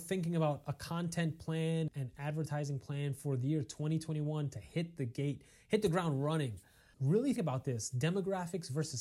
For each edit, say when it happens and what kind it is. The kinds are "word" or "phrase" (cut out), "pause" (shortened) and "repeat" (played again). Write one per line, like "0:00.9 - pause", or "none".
0:01.9 - word
0:06.9 - word
0:07.4 - word